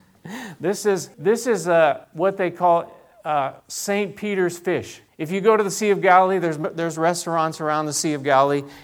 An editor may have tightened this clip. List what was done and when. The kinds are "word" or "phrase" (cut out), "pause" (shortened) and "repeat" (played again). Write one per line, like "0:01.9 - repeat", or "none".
0:01.1 - pause
0:02.0 - pause
0:03.6 - pause
0:05.1 - pause